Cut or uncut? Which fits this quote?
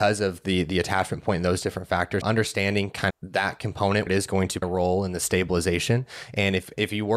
cut